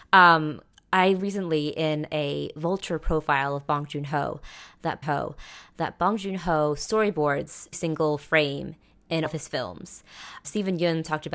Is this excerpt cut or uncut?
cut